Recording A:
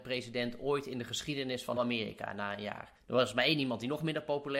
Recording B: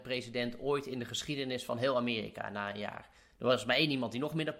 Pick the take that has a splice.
A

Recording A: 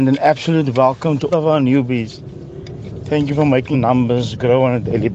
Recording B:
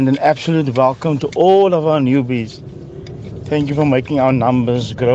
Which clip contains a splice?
A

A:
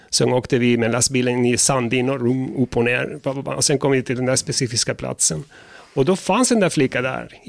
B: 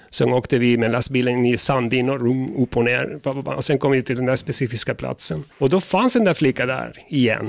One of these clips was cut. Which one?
B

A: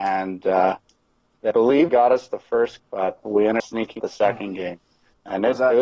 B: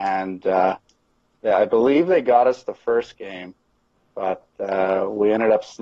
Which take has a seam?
A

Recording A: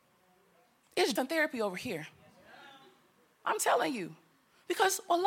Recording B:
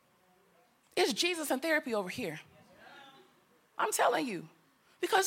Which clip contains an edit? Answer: A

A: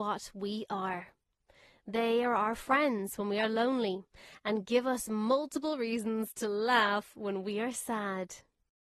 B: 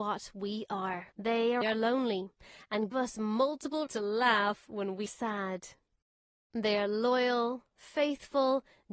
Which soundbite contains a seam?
B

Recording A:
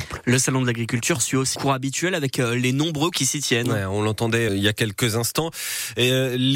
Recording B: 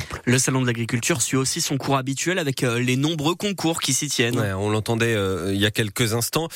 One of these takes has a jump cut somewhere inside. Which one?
A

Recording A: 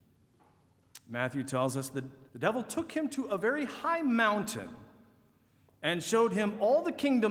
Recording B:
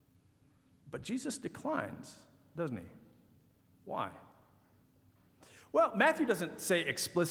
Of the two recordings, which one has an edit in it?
A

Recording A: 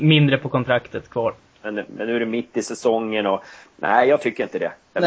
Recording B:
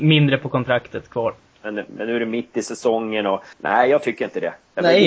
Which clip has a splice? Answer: B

